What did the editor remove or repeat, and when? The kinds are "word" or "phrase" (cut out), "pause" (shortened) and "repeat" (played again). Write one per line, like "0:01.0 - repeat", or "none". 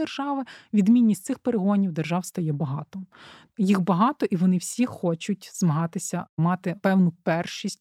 none